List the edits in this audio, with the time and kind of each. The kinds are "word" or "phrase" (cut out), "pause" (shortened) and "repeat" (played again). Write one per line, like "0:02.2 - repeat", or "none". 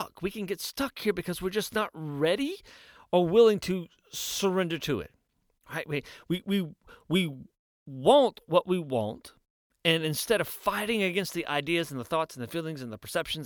none